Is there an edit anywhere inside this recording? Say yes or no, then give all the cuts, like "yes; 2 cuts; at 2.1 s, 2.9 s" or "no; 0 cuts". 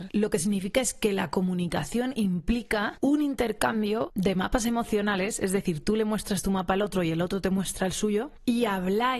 no; 0 cuts